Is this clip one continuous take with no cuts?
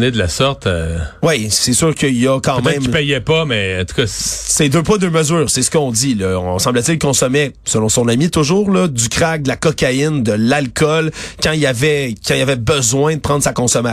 yes; 0 cuts

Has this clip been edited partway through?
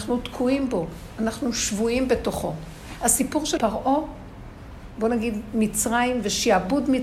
yes; 1 cut; at 3.6 s

